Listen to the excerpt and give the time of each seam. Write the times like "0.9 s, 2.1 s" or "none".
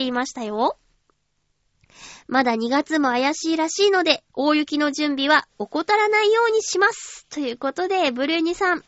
4.3 s